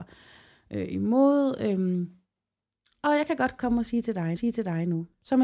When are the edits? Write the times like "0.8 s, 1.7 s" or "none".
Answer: 4.4 s